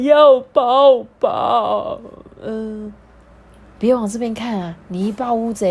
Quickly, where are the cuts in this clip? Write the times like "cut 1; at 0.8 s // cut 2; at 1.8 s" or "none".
none